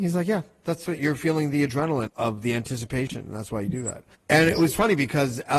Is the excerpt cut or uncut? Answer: cut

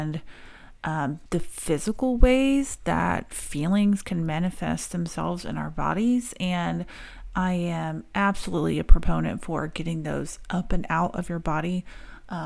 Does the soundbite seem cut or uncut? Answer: cut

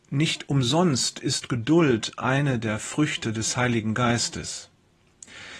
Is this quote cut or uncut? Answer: uncut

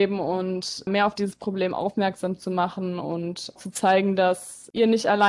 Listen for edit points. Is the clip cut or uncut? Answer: cut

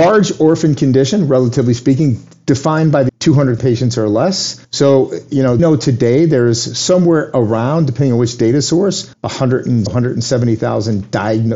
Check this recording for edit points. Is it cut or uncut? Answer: cut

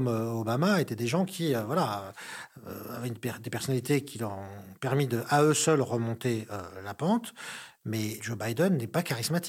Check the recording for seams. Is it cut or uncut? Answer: uncut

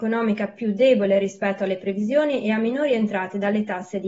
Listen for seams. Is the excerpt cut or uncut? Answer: uncut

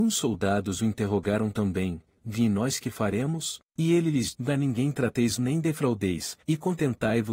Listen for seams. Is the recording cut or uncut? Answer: cut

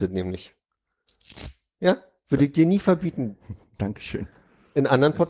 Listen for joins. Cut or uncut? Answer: uncut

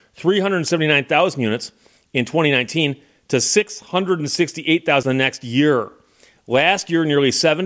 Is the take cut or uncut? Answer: cut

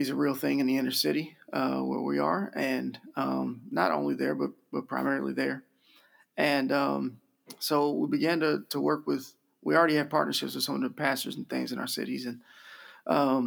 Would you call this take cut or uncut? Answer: uncut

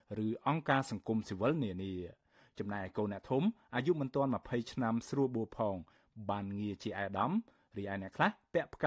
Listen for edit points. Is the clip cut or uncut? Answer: uncut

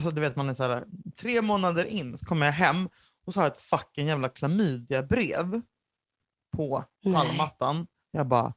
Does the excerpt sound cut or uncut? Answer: uncut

